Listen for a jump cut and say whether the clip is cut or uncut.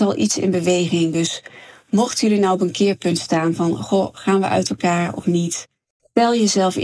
uncut